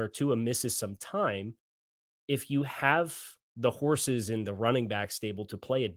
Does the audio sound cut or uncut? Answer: uncut